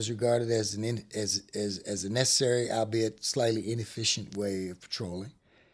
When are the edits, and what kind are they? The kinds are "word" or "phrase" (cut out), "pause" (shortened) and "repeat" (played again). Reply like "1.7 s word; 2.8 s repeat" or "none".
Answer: none